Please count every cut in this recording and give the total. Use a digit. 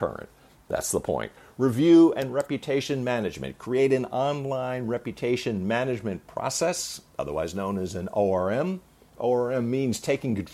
0